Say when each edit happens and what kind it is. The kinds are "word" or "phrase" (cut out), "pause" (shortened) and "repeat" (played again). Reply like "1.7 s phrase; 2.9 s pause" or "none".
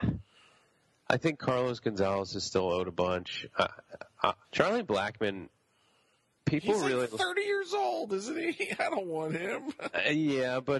4.4 s pause